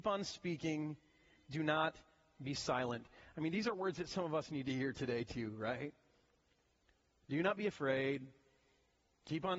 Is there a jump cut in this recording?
no; 0 cuts

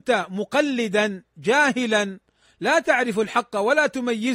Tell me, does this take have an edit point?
no; 0 cuts

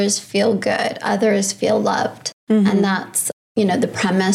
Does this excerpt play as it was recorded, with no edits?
yes; 0 cuts

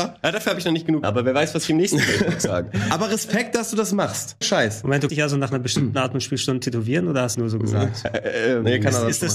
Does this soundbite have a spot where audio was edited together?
yes; 4 cuts; at 1.0 s, 4.4 s, 5.1 s, 7.3 s

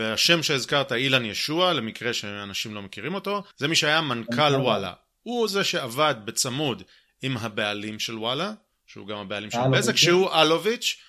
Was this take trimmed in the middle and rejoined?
yes; 1 cut; at 3.5 s

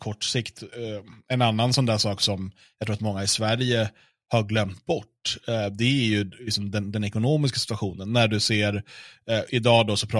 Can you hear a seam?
no; 0 cuts

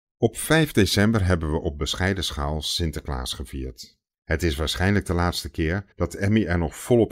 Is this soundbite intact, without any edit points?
no; 2 cuts; at 4.1 s, 5.9 s

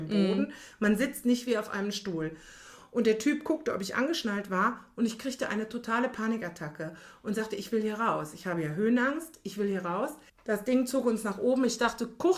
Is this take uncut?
no; 1 cut; at 10.3 s

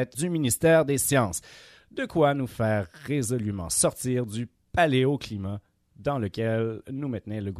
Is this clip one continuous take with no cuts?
yes; 0 cuts

